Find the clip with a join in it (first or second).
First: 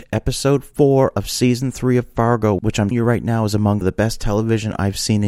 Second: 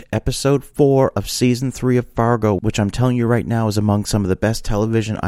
first